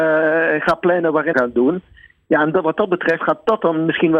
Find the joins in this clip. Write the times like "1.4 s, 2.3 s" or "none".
1.3 s